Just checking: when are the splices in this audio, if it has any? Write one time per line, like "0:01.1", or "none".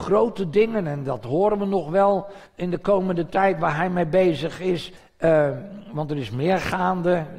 0:02.5
0:05.0

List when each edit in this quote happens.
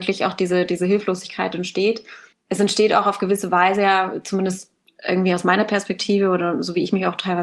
none

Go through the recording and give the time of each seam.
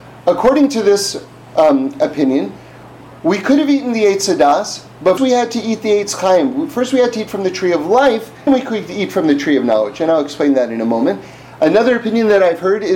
0:05.2
0:08.5

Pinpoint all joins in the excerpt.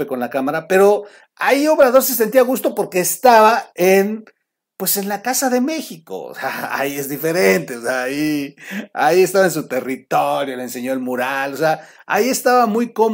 none

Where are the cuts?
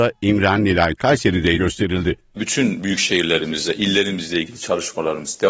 0:01.0
0:01.6

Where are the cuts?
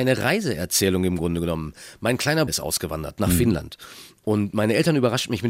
0:02.5

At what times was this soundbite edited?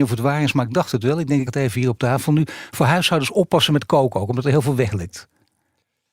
0:01.5

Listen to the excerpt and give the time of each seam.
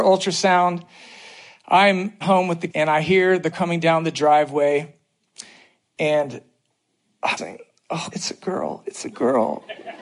0:02.2
0:02.7
0:03.5
0:07.4
0:08.1

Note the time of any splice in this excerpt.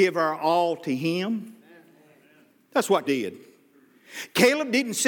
0:03.0

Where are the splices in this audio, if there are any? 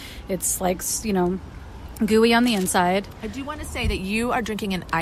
none

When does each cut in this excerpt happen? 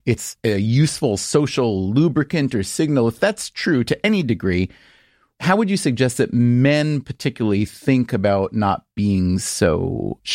none

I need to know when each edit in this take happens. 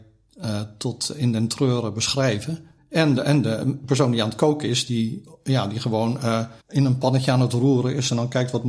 0:02.8
0:06.6

